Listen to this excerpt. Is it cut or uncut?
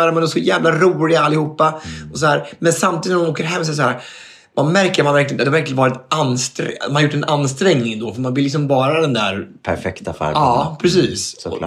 uncut